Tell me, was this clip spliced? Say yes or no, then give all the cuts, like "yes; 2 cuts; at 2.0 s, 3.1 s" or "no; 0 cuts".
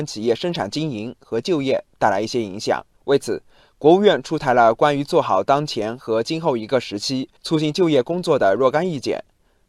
yes; 2 cuts; at 2.9 s, 7.4 s